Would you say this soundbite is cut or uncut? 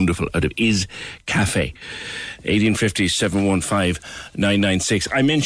uncut